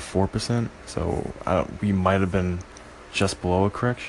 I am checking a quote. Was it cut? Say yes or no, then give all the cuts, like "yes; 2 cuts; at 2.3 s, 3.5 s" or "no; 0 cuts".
no; 0 cuts